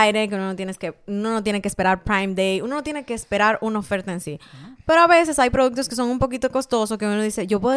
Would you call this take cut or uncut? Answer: uncut